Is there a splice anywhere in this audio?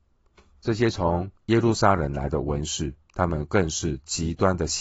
yes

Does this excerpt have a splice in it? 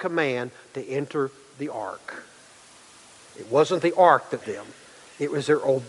yes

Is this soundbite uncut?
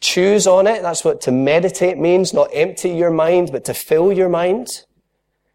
yes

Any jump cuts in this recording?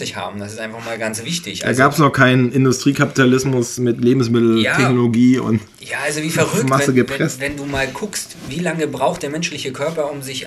no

